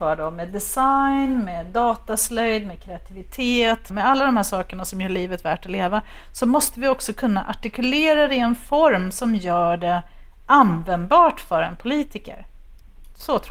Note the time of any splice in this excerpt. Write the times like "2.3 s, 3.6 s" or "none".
3.9 s